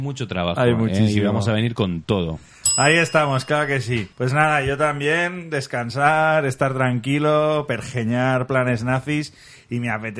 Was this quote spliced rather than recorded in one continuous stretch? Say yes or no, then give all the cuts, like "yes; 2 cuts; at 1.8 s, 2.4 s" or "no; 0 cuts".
yes; 1 cut; at 4.1 s